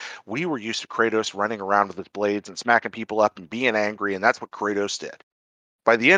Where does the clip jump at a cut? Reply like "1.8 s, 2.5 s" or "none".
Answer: none